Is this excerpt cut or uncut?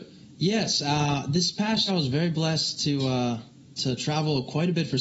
cut